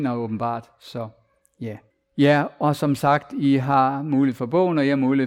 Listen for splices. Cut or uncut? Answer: cut